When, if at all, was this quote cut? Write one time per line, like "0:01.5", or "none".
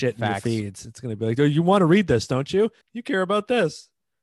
0:02.8